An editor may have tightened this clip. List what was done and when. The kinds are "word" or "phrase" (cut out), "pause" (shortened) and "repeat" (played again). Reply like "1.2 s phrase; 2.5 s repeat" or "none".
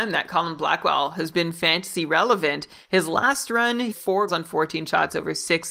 3.9 s word; 4.3 s word